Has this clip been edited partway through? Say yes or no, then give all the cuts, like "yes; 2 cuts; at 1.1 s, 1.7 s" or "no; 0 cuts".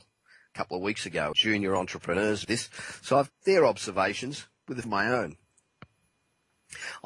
yes; 4 cuts; at 1.3 s, 2.4 s, 3.3 s, 4.8 s